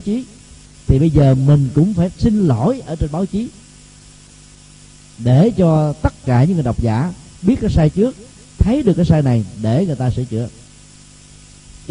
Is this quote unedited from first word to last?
yes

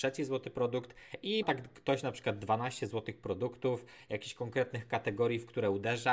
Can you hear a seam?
yes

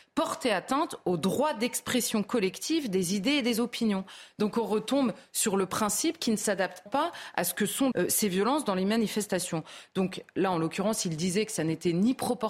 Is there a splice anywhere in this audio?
yes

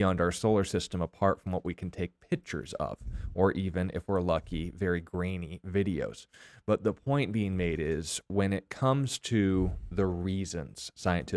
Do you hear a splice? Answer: no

